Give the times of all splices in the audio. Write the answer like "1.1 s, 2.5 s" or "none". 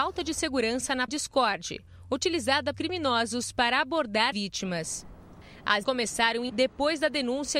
1.1 s, 2.7 s, 4.3 s, 5.8 s, 6.5 s